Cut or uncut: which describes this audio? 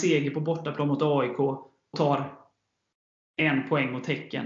cut